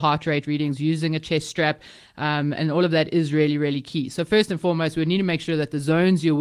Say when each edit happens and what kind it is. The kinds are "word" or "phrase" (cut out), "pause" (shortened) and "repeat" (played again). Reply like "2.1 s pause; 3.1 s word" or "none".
none